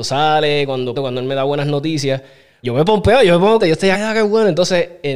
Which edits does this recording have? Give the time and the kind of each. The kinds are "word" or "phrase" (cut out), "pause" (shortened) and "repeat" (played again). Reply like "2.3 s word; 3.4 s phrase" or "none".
0.9 s phrase; 2.6 s word; 3.6 s word; 3.9 s word